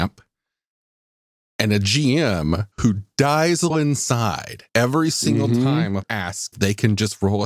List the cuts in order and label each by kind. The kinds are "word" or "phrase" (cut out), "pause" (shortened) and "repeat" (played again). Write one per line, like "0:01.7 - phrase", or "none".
0:02.7 - pause
0:03.7 - word
0:04.7 - pause
0:06.0 - word
0:06.5 - word